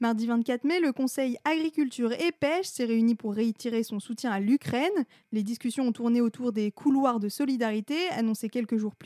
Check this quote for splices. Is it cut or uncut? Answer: uncut